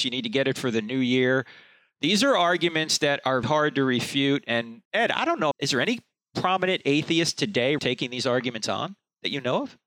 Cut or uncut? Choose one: cut